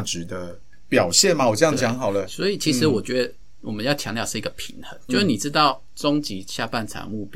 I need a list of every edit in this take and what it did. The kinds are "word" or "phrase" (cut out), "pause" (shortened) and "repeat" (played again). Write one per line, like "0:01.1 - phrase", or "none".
0:05.1 - word